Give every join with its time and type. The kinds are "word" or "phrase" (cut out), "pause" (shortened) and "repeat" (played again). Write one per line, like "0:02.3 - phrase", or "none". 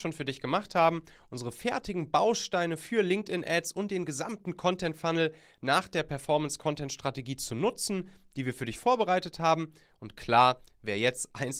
none